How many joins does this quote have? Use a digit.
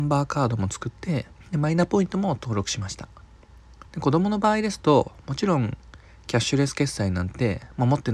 2